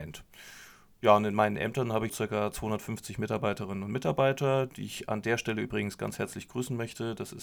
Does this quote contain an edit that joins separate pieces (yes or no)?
yes